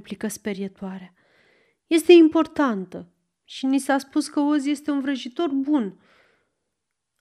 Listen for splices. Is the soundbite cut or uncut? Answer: uncut